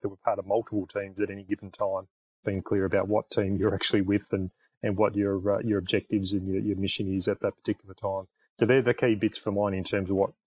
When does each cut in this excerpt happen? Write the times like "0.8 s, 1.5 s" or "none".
2.4 s